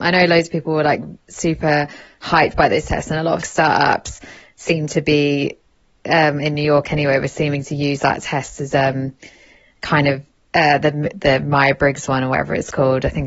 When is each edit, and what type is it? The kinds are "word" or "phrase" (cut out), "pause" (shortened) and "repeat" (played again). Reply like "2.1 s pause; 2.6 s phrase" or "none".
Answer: 3.4 s phrase; 10.4 s pause